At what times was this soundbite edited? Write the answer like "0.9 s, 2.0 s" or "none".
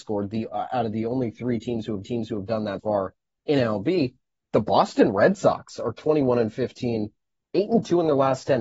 2.0 s, 2.8 s